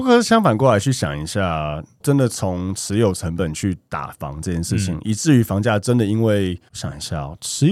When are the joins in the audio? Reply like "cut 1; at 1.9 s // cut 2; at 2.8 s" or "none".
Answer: cut 1; at 2.0 s // cut 2; at 6.7 s